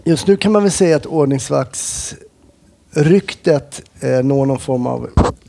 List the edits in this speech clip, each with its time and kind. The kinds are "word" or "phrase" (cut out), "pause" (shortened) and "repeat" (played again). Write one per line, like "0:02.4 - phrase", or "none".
none